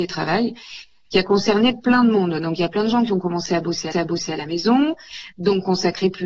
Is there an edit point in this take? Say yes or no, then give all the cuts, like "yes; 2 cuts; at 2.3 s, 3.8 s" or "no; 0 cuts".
yes; 1 cut; at 3.9 s